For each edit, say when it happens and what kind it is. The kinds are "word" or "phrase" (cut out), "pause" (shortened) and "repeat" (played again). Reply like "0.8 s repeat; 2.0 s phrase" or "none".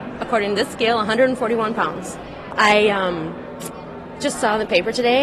none